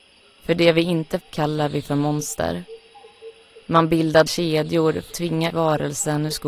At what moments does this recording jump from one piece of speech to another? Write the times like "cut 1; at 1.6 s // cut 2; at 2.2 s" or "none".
cut 1; at 1.2 s // cut 2; at 4.3 s // cut 3; at 5.1 s // cut 4; at 5.5 s